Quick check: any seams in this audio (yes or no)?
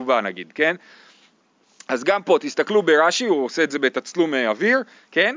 no